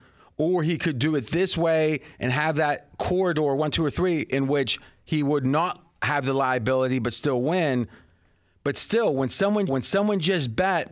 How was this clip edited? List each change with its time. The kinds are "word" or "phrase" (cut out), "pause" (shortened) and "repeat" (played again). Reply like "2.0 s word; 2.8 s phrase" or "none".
9.7 s repeat